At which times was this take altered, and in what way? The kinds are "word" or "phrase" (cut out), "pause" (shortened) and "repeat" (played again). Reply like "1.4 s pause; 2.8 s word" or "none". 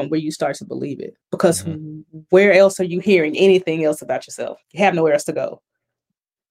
1.2 s pause; 4.6 s pause